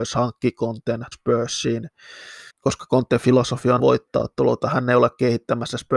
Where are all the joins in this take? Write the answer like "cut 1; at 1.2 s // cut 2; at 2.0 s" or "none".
cut 1; at 1.1 s // cut 2; at 2.5 s // cut 3; at 3.8 s

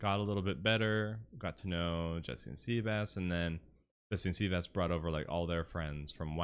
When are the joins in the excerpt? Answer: none

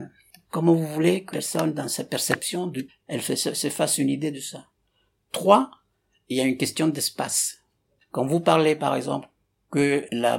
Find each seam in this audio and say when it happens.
cut 1; at 1.3 s // cut 2; at 2.9 s

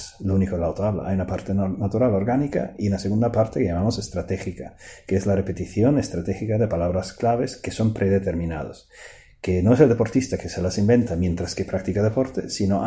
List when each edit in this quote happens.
none

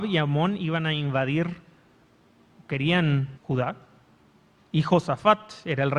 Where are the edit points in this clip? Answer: cut 1; at 3.3 s

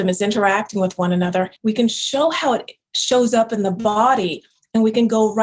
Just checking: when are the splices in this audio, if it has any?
cut 1; at 1.6 s

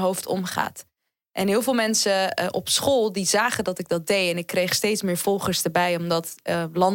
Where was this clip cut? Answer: none

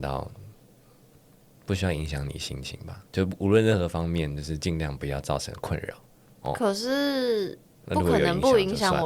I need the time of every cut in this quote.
cut 1; at 3.1 s // cut 2; at 6.3 s

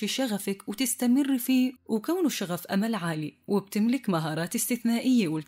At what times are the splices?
cut 1; at 1.8 s

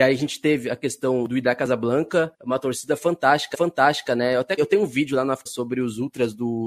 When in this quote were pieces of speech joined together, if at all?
cut 1; at 2.3 s // cut 2; at 3.5 s // cut 3; at 4.6 s // cut 4; at 5.5 s

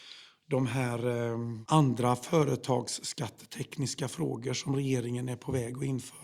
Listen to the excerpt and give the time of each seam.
none

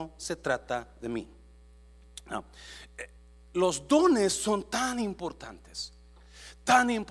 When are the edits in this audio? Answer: cut 1; at 3.1 s

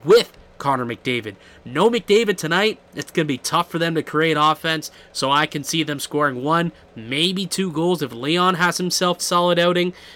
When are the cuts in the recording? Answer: cut 1; at 9.2 s

